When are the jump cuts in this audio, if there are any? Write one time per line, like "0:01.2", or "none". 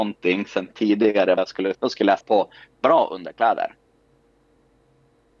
0:01.4
0:01.7
0:02.2

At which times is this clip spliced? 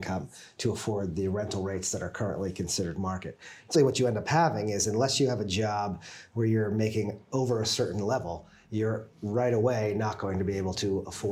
0:03.7

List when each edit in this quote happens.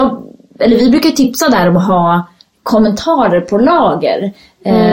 none

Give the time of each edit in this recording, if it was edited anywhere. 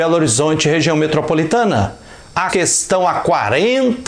0:02.5

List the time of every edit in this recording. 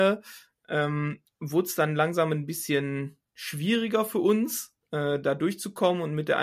0:01.3
0:04.8

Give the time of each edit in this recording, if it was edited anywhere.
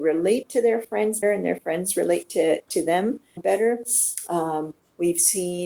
0:01.2
0:03.4

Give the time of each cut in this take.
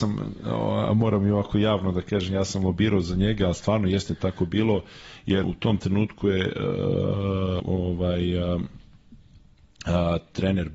0:05.4
0:07.6

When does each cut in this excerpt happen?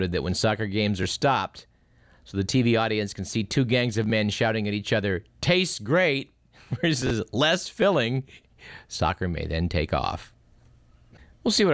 none

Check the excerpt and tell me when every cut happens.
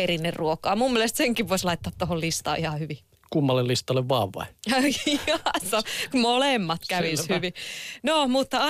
none

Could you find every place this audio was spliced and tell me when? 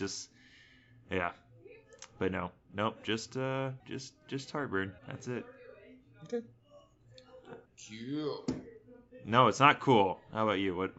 0:03.8
0:05.0
0:07.7

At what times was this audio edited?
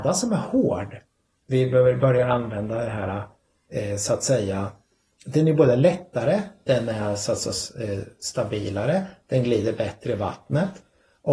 none

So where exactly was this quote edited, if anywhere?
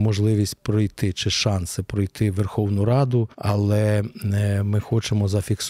0:03.3

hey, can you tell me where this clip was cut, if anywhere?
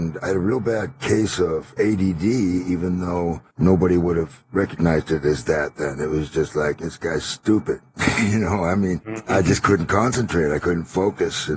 0:01.0
0:03.5

